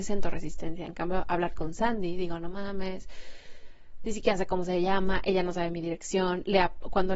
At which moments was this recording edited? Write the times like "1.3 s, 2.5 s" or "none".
none